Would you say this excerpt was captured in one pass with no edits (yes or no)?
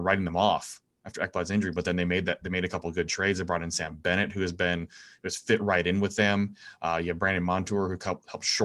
yes